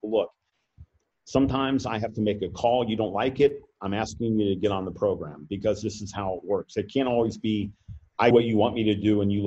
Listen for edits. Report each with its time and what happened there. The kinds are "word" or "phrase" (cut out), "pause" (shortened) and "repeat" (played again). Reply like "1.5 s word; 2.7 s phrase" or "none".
8.3 s word

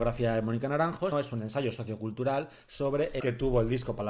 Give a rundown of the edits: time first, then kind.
1.1 s word; 3.2 s word

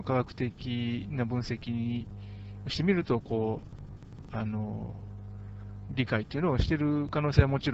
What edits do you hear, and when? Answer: 4.3 s phrase

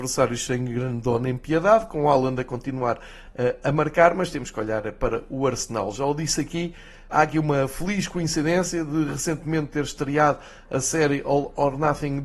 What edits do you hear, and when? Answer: 7.1 s word

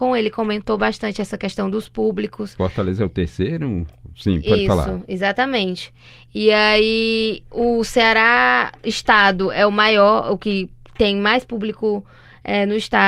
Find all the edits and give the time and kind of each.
none

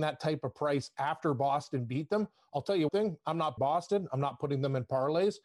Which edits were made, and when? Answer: 2.9 s word; 3.6 s word

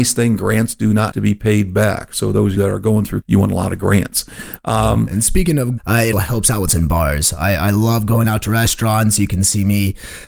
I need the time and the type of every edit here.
1.1 s word; 2.6 s word; 3.2 s word; 5.8 s phrase; 6.1 s word; 6.7 s word

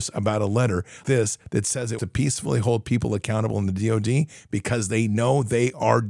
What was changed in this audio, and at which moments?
1.0 s word; 2.0 s word

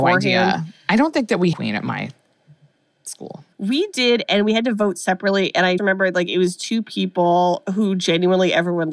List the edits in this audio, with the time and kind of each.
1.5 s phrase; 3.5 s pause; 5.8 s word

